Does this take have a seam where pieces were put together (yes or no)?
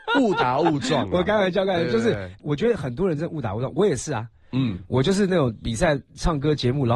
yes